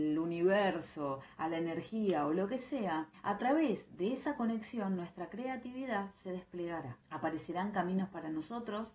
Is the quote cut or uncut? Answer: cut